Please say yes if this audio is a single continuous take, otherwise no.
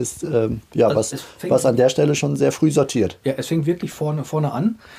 yes